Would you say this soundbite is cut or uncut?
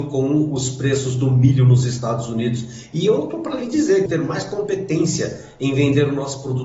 cut